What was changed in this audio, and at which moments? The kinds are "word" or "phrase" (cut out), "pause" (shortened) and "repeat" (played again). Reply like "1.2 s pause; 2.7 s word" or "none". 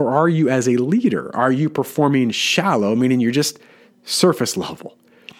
none